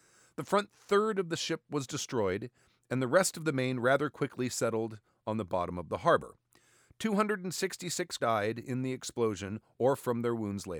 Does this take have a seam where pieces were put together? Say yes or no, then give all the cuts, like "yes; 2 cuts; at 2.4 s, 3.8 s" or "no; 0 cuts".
yes; 1 cut; at 8.2 s